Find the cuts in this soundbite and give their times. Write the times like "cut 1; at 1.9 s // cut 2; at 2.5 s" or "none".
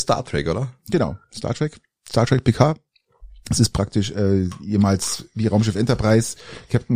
cut 1; at 1.2 s